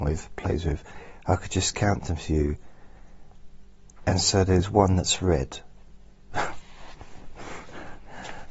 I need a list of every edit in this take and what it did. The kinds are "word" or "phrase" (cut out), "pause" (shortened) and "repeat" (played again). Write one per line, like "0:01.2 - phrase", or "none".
none